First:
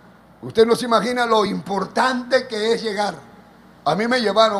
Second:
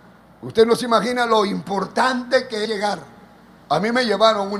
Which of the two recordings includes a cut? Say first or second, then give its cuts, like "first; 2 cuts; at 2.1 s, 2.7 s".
second; 1 cut; at 2.6 s